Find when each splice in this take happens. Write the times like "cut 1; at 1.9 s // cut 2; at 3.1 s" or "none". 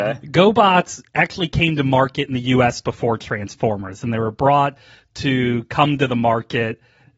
none